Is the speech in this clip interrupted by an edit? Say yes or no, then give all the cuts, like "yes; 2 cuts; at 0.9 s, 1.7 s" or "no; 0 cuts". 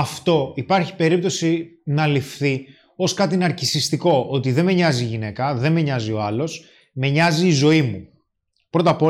no; 0 cuts